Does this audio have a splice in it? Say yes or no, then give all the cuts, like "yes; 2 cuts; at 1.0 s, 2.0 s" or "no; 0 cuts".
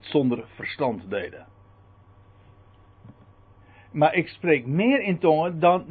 no; 0 cuts